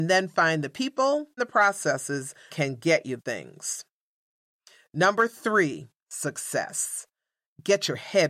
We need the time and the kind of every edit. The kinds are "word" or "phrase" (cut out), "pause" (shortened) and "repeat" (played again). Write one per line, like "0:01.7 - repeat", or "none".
0:01.4 - word
0:02.5 - word
0:03.2 - word
0:06.1 - word